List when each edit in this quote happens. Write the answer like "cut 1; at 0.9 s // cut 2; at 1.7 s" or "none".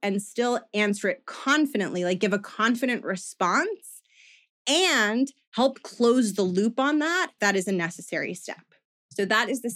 cut 1; at 7.4 s